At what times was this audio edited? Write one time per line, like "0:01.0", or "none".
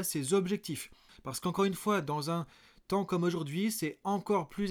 0:01.1